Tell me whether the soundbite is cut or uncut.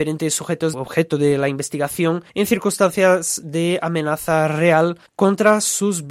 cut